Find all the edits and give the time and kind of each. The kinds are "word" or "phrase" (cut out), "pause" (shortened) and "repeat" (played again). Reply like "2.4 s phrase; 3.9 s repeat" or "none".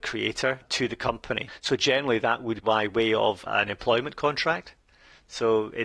2.6 s word